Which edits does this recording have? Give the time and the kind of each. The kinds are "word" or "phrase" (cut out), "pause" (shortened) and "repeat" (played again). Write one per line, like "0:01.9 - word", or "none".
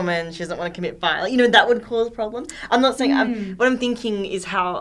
none

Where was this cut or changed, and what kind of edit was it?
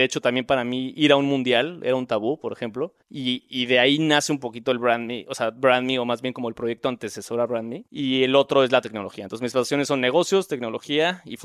0:03.0 - pause
0:07.9 - pause

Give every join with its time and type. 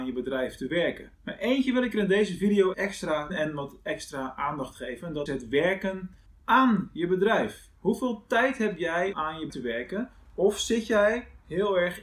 0:01.1 - pause
0:02.7 - word
0:03.3 - phrase
0:05.3 - word
0:06.3 - pause
0:07.8 - pause
0:09.1 - word
0:09.5 - word

